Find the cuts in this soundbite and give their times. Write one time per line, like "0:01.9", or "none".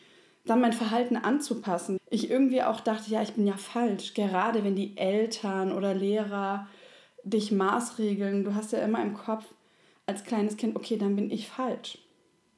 0:02.0